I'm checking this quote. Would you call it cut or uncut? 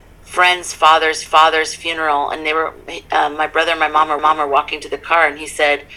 cut